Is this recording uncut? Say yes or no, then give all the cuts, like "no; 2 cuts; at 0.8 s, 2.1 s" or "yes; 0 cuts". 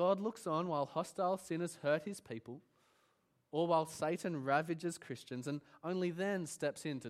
yes; 0 cuts